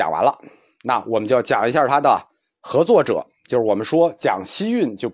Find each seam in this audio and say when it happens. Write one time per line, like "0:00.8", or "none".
none